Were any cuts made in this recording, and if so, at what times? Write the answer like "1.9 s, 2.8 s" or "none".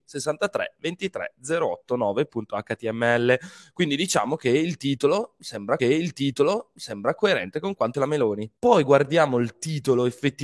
5.8 s, 7.9 s, 8.6 s